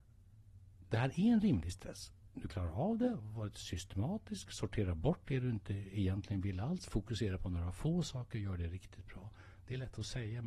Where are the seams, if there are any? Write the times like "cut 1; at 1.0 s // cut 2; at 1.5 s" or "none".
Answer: cut 1; at 2.5 s

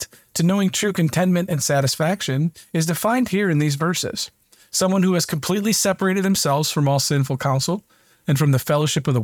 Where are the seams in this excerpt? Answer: none

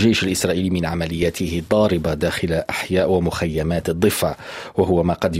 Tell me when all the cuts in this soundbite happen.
none

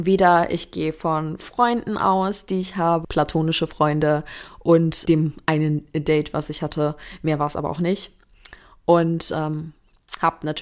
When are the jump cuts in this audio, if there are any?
cut 1; at 3.0 s // cut 2; at 5.1 s

